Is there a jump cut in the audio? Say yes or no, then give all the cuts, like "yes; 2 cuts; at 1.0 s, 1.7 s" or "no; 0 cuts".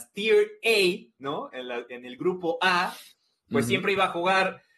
no; 0 cuts